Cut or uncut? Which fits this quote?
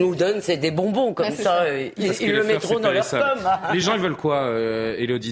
uncut